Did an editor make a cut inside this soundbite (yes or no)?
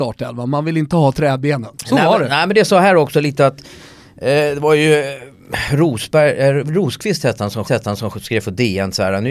yes